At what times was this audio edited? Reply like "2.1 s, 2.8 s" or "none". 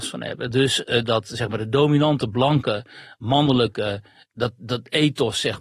none